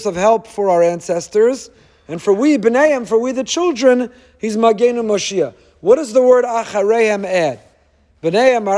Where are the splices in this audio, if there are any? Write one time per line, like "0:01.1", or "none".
none